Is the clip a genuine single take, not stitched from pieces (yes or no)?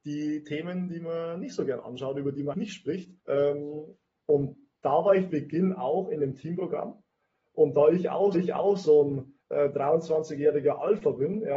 no